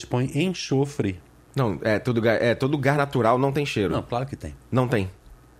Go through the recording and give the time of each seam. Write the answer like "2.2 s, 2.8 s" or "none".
none